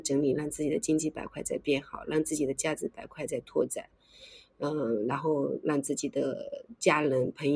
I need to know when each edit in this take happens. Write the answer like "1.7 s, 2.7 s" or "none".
none